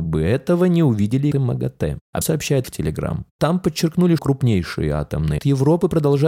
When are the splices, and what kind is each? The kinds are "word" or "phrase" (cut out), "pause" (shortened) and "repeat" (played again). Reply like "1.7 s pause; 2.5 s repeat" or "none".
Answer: 1.3 s word; 2.2 s word; 2.6 s word; 4.2 s word; 5.4 s word